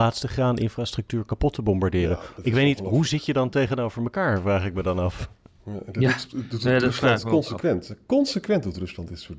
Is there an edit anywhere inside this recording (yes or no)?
no